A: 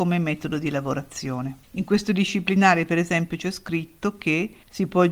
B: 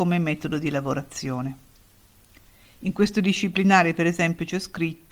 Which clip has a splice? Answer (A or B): A